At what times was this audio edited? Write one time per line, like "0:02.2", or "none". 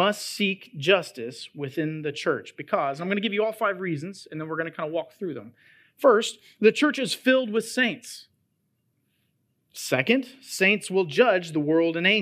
none

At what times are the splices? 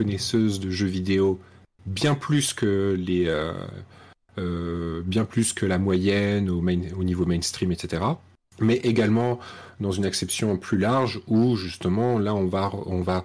none

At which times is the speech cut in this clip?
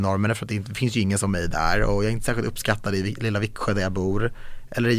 none

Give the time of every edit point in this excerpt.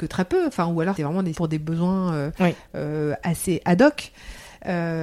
0:01.0
0:01.3

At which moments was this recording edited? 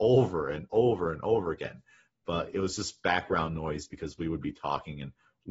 none

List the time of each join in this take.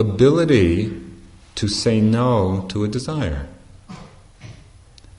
none

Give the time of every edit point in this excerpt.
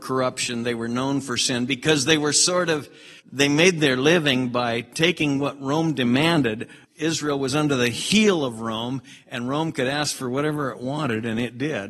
0:03.2
0:06.8

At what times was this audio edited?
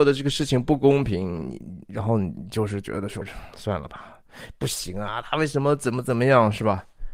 0:03.2

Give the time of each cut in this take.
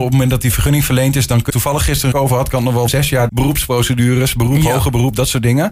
0:01.5
0:02.1
0:02.9
0:03.3

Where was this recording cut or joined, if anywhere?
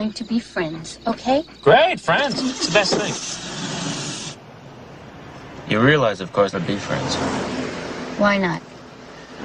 0:06.5

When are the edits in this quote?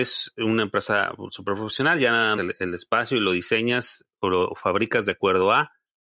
0:02.4

